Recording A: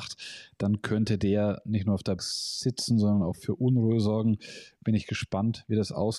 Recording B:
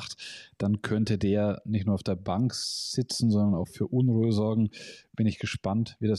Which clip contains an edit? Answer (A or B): A